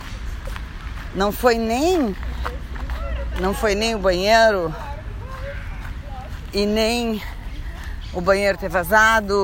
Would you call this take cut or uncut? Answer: uncut